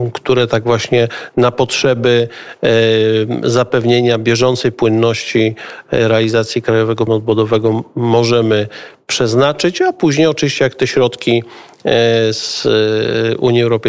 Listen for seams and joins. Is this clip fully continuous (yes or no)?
no